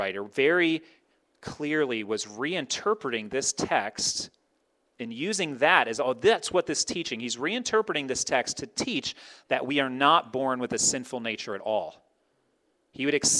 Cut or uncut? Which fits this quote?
uncut